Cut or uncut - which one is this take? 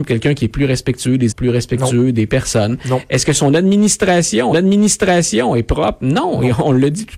cut